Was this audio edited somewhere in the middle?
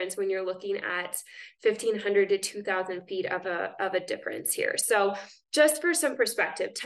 no; 0 cuts

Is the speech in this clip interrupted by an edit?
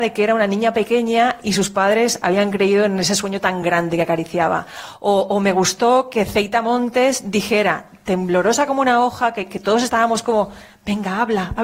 no; 0 cuts

